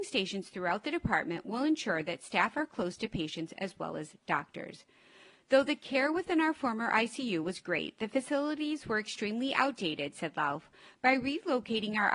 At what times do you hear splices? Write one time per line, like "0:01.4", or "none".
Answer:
none

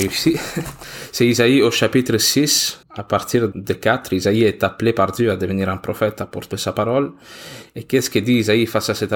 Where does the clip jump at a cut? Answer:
0:02.8
0:03.5
0:06.5

